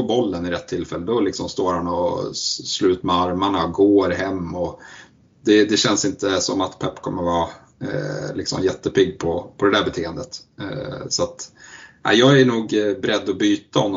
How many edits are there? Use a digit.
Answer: 0